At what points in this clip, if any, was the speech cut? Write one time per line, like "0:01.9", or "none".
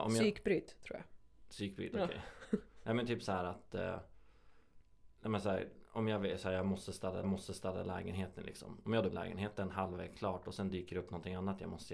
0:07.2
0:09.1